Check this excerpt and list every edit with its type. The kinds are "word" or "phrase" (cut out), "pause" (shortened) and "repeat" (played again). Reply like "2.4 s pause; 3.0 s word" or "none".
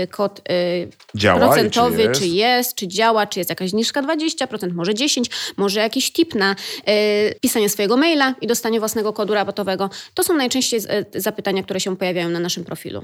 7.4 s pause